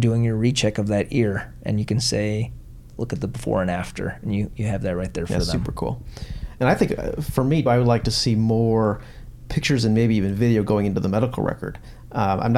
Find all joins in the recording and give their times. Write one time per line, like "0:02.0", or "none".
0:07.7